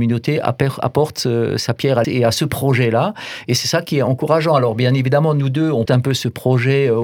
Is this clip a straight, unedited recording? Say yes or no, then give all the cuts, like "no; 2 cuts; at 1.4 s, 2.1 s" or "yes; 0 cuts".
no; 2 cuts; at 2.0 s, 5.9 s